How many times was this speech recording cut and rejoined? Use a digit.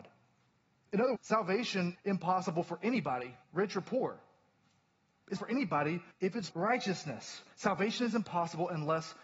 7